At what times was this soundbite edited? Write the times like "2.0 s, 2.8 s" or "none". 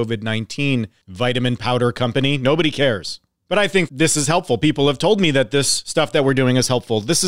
3.9 s